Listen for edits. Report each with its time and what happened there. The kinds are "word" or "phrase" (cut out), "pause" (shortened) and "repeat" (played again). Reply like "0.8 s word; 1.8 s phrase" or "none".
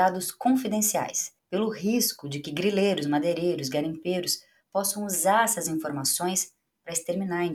1.4 s pause